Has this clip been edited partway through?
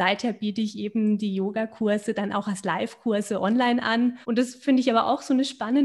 yes; 1 cut; at 4.2 s

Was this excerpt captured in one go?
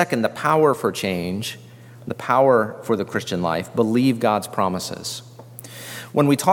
yes; 0 cuts

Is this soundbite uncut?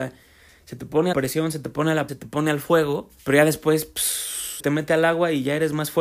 no; 4 cuts; at 1.1 s, 2.1 s, 3.2 s, 4.6 s

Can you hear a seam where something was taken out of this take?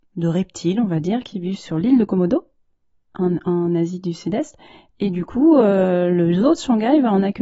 no; 0 cuts

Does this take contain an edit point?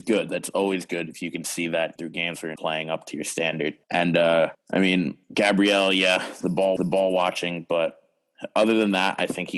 yes; 6 cuts; at 2.0 s, 2.6 s, 3.8 s, 4.5 s, 5.2 s, 6.8 s

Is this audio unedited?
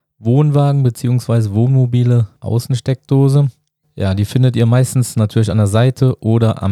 no; 2 cuts; at 2.4 s, 3.8 s

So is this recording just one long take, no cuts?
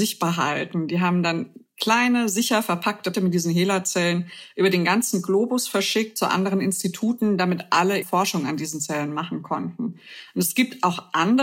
no; 2 cuts; at 3.1 s, 8.0 s

